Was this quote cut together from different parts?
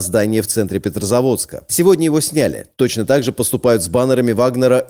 no; 0 cuts

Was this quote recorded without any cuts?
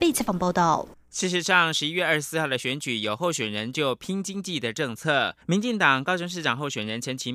no; 1 cut; at 5.4 s

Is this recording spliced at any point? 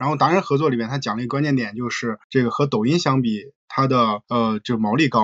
yes; 2 cuts; at 2.2 s, 4.2 s

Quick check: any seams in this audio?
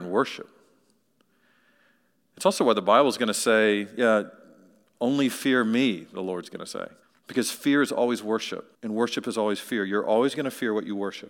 yes; 2 cuts; at 7.0 s, 8.7 s

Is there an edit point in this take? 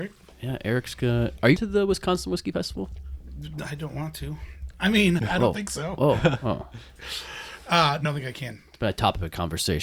yes; 3 cuts; at 1.6 s, 5.2 s, 8.1 s

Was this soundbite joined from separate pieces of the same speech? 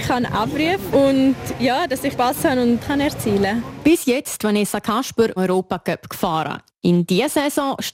yes; 5 cuts; at 0.9 s, 2.1 s, 2.8 s, 4.4 s, 5.4 s

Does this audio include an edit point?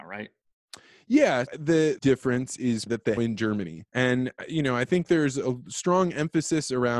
yes; 5 cuts; at 1.5 s, 2.0 s, 2.9 s, 3.2 s, 3.9 s

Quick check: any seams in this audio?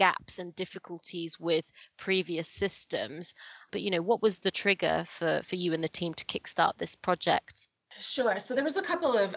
no; 0 cuts

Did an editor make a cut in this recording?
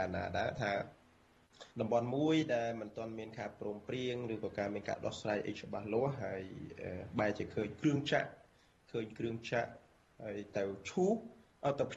yes; 1 cut; at 1.7 s

